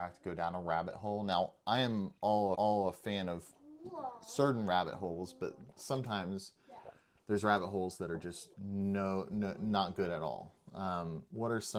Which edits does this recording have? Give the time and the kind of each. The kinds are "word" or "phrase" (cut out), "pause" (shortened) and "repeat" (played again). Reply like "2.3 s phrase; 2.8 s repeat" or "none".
2.5 s repeat; 8.5 s pause